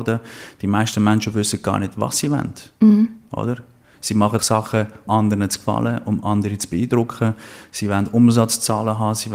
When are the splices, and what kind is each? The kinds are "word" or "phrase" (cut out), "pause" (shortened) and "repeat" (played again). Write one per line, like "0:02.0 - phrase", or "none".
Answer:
0:04.4 - word
0:05.1 - word